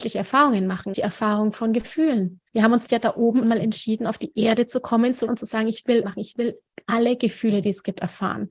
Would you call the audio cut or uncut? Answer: cut